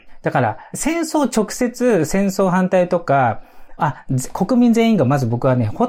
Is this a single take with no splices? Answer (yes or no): no